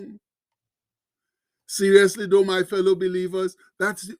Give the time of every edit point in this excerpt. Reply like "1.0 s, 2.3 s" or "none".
none